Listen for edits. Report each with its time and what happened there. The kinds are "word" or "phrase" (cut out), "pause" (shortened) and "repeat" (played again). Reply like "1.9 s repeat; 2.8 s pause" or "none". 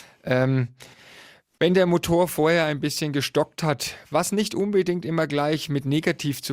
none